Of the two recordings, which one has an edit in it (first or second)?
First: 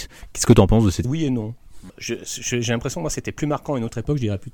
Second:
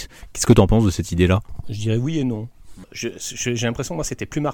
first